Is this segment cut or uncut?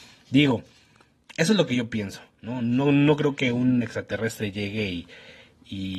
uncut